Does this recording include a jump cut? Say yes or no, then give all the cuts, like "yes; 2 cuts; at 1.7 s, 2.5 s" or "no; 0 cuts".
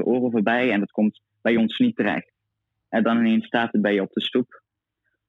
no; 0 cuts